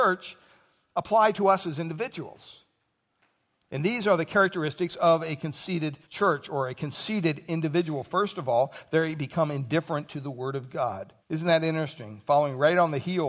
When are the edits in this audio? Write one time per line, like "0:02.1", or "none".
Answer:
0:06.0
0:11.2